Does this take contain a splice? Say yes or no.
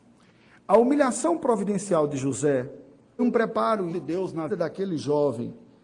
yes